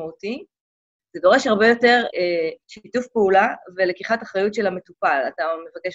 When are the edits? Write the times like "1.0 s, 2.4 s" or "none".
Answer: 2.1 s, 2.6 s

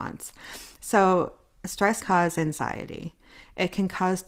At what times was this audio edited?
2.0 s

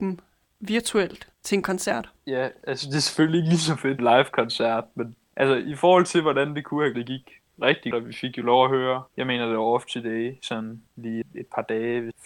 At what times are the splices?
1.3 s, 2.2 s, 4.0 s, 6.9 s, 7.9 s, 11.2 s

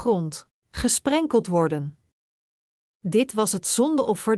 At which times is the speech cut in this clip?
none

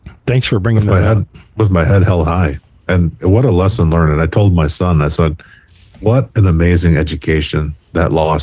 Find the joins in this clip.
none

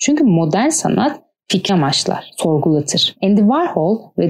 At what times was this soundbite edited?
1.7 s

